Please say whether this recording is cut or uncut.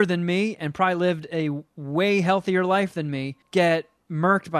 cut